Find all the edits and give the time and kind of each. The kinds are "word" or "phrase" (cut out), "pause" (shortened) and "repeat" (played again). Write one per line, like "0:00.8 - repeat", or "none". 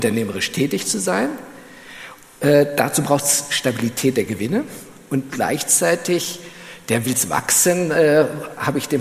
none